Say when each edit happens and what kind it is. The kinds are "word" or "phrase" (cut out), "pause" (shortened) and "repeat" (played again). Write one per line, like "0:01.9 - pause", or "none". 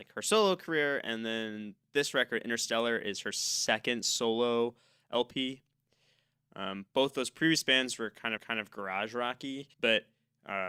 0:08.4 - repeat
0:09.7 - pause